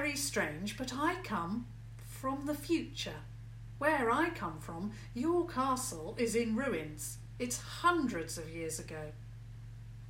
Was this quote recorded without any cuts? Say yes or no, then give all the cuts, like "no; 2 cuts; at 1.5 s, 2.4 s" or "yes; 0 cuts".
yes; 0 cuts